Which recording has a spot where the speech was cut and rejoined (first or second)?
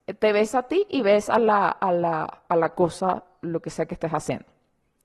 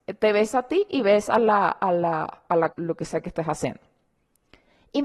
second